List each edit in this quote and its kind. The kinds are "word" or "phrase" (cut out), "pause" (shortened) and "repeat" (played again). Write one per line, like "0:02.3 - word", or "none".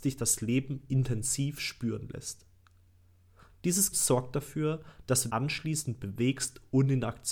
0:03.9 - word
0:05.3 - word